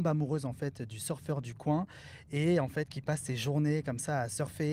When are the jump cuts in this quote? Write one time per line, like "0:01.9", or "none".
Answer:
none

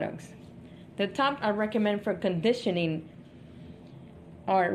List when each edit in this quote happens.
0:01.4

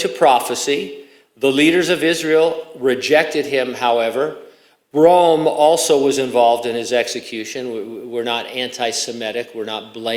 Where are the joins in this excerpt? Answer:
none

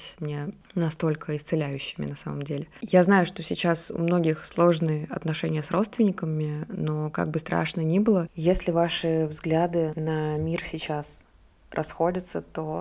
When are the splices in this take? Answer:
none

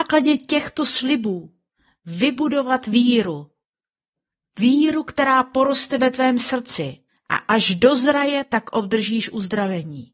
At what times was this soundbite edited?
0:07.1

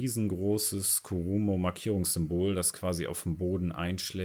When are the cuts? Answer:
none

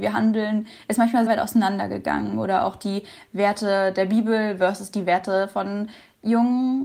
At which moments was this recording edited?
0:01.3

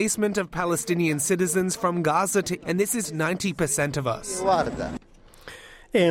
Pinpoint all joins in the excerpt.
0:02.6
0:03.0

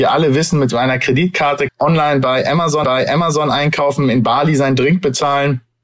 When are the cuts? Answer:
0:01.7
0:02.8

